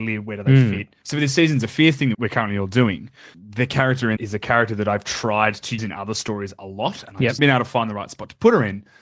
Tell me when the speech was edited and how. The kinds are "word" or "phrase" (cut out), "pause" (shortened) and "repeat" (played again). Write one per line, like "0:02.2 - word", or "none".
0:02.1 - word
0:04.2 - word
0:05.8 - word
0:07.4 - word